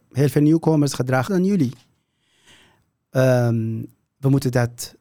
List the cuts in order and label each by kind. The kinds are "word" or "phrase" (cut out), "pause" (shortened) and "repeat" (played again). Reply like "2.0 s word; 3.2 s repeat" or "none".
1.3 s word